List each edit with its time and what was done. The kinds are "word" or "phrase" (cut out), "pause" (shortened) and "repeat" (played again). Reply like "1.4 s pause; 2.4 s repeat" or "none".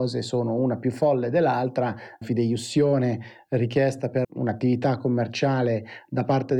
2.2 s word; 4.2 s word